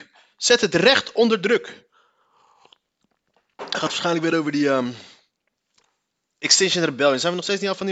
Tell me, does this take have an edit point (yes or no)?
no